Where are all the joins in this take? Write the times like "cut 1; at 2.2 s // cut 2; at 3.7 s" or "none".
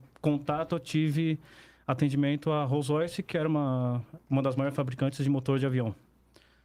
none